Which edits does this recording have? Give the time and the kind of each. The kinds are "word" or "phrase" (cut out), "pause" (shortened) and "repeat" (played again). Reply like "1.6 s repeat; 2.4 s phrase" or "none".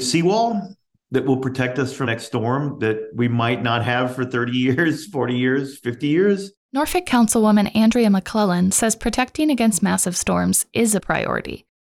2.0 s word